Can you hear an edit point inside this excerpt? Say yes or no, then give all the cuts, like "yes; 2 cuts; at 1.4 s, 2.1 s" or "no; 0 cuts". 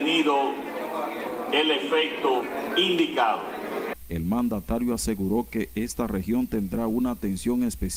no; 0 cuts